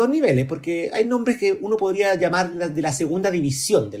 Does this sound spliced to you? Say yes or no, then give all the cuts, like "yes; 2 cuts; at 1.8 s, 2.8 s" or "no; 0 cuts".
no; 0 cuts